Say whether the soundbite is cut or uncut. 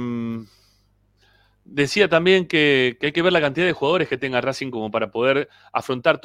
uncut